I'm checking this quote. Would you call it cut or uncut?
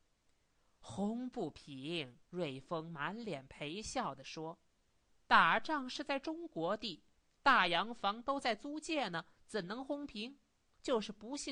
cut